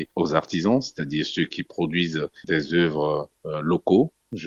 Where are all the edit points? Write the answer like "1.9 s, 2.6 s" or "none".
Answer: none